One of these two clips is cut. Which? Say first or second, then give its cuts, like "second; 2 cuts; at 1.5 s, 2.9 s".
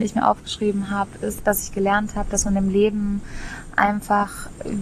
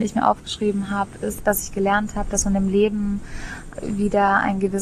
second; 1 cut; at 3.7 s